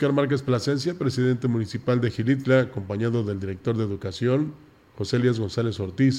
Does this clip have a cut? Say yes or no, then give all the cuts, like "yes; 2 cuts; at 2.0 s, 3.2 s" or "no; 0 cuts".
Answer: no; 0 cuts